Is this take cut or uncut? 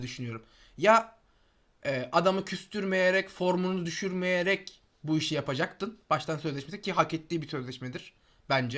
uncut